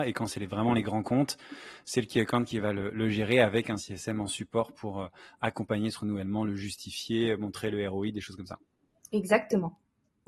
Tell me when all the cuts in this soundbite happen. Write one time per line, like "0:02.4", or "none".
none